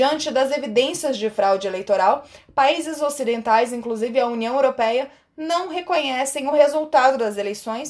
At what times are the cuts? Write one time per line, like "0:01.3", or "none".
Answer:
none